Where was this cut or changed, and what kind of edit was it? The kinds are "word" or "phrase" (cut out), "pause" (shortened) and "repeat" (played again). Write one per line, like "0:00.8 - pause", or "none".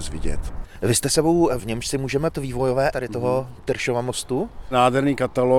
0:01.6 - phrase
0:02.3 - word
0:02.9 - word